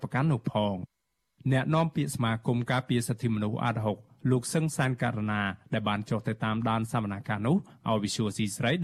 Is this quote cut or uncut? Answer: uncut